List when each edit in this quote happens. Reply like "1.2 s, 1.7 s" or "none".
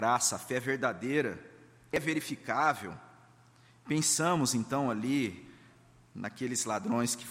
none